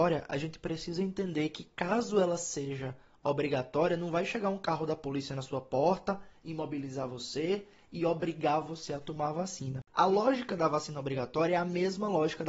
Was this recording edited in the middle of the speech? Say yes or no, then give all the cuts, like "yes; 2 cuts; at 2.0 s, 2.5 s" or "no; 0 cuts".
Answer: no; 0 cuts